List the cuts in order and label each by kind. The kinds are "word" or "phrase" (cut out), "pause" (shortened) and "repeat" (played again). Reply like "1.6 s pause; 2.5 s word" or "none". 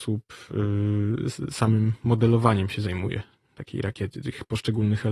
none